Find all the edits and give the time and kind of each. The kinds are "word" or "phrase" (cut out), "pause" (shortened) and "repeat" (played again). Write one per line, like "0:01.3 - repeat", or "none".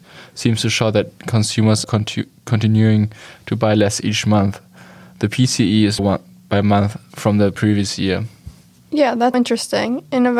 0:01.8 - word
0:06.0 - phrase
0:09.3 - word